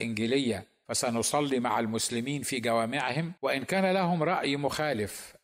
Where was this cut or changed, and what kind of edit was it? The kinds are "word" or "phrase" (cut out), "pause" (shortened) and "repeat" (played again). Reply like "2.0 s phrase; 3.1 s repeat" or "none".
3.4 s pause